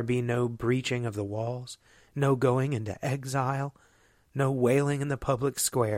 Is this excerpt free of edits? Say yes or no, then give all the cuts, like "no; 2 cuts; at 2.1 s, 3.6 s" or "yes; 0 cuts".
yes; 0 cuts